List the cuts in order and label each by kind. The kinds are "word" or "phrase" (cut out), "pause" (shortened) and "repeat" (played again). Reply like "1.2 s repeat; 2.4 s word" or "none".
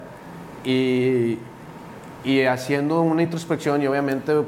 none